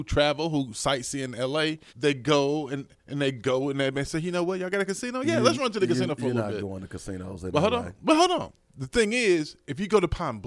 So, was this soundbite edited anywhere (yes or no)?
yes